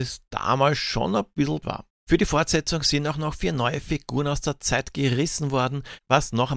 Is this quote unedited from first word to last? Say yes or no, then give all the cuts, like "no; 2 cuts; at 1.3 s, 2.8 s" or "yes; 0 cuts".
no; 1 cut; at 1.6 s